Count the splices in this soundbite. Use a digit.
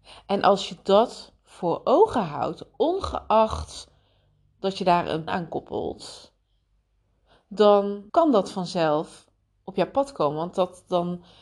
2